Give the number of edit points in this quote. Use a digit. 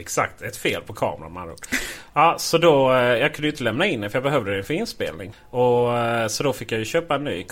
0